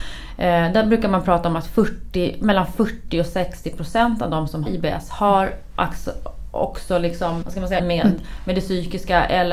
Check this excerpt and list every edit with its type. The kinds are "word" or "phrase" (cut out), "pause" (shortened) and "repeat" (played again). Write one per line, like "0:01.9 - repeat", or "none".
0:04.7 - word
0:07.4 - word
0:07.8 - word